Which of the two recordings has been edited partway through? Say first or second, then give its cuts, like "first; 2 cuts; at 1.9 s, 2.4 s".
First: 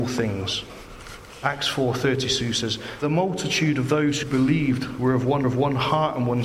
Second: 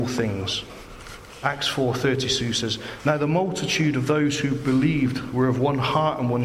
first; 3 cuts; at 3.0 s, 4.2 s, 5.4 s